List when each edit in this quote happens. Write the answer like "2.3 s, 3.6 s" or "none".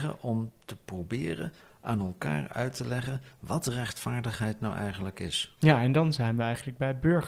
none